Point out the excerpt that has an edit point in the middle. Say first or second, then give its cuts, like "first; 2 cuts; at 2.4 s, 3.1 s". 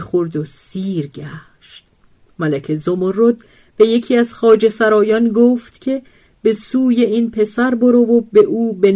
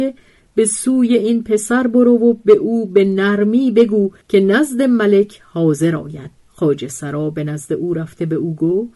second; 2 cuts; at 4.2 s, 6.4 s